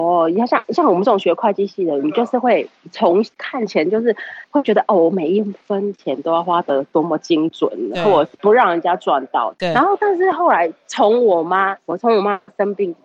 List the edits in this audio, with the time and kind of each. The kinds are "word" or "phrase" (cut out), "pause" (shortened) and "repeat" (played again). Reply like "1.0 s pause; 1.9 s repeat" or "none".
3.3 s pause; 4.4 s pause; 5.6 s pause; 11.8 s pause